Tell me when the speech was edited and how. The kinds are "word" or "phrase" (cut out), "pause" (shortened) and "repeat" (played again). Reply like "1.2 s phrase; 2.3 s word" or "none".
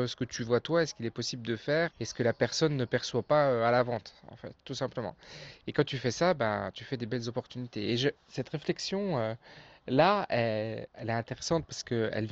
1.9 s word; 8.2 s pause; 10.9 s word